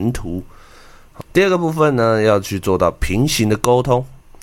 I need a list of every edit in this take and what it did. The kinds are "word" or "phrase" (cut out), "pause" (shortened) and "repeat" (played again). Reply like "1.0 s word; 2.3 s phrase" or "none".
1.2 s word